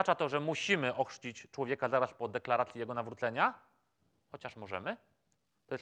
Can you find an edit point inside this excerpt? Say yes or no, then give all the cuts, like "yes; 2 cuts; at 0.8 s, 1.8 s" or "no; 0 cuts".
no; 0 cuts